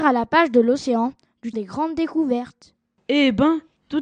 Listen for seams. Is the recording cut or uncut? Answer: cut